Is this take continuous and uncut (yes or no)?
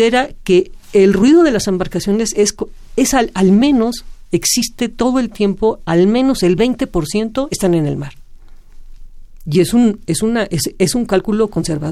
yes